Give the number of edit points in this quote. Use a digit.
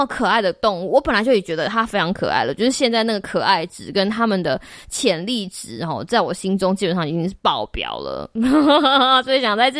0